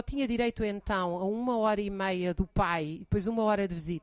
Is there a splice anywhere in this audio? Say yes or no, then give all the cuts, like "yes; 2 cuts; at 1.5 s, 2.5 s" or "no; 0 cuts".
no; 0 cuts